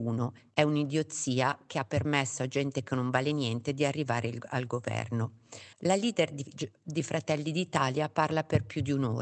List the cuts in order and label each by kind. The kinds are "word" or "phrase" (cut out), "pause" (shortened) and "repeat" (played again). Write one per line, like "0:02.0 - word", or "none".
0:05.7 - pause